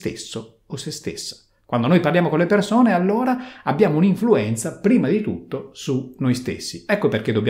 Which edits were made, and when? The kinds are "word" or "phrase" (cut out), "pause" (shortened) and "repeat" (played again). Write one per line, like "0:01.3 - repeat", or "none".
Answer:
none